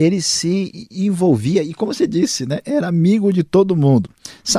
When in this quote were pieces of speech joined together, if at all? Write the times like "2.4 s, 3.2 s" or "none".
none